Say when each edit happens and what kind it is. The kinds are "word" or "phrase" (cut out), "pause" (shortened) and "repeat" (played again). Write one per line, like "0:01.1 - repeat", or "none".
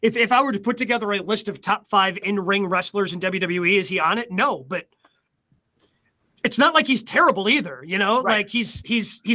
none